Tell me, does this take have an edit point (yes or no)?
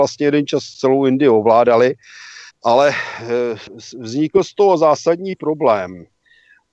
yes